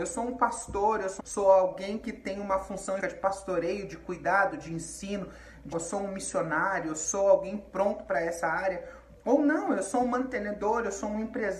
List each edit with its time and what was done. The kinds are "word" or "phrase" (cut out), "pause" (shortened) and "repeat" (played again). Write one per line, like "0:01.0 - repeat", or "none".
0:01.2 - word
0:03.0 - word
0:05.7 - word